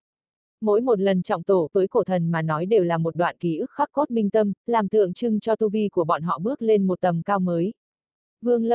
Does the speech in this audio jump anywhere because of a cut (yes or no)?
yes